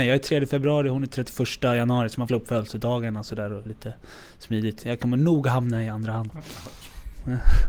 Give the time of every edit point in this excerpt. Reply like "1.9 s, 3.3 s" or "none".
2.3 s, 3.7 s, 6.3 s